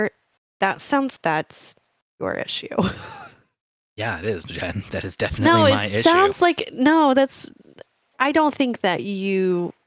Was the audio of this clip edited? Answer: yes; 1 cut; at 1.2 s

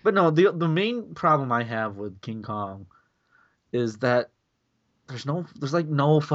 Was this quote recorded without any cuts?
yes; 0 cuts

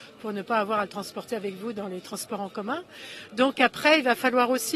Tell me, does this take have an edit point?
no; 0 cuts

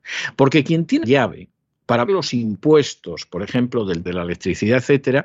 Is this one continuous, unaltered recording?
no; 3 cuts; at 1.0 s, 2.1 s, 4.1 s

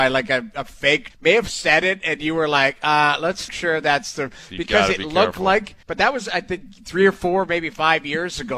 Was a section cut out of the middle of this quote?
yes; 3 cuts; at 1.1 s, 3.5 s, 5.8 s

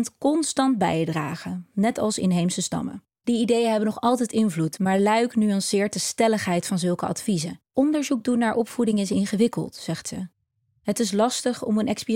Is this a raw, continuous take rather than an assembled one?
no; 2 cuts; at 3.1 s, 7.7 s

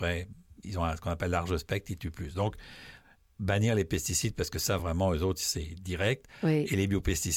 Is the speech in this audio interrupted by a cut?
no; 0 cuts

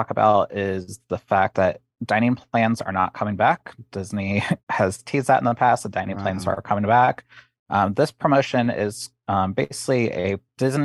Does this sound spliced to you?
yes; 1 cut; at 4.6 s

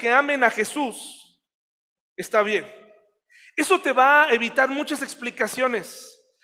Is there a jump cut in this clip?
no; 0 cuts

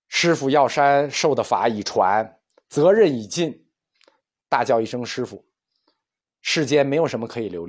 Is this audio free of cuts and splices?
yes; 0 cuts

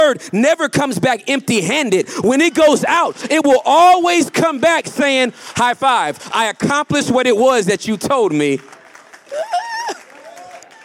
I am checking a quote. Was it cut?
no; 0 cuts

